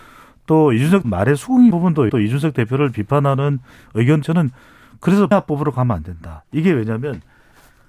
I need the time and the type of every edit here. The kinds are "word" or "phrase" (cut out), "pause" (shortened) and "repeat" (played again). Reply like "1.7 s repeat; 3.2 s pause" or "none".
1.0 s word; 1.7 s word; 2.1 s word; 4.2 s word; 5.3 s word